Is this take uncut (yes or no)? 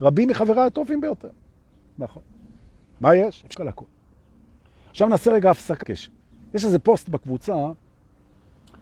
no